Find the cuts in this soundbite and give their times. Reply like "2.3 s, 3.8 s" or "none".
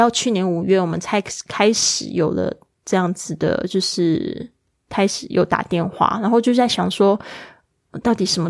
none